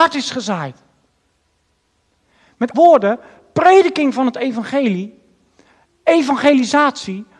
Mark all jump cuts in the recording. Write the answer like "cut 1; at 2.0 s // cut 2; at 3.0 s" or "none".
cut 1; at 2.7 s